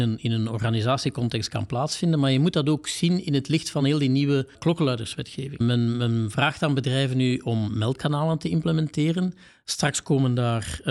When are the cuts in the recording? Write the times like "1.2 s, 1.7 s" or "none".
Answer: none